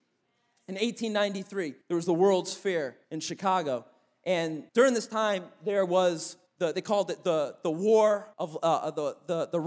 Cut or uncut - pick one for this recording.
cut